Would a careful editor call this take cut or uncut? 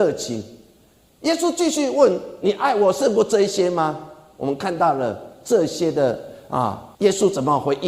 cut